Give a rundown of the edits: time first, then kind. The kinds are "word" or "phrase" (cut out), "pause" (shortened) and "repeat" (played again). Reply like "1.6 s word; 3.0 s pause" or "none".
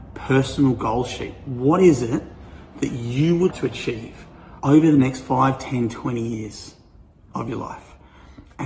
3.5 s word; 4.6 s pause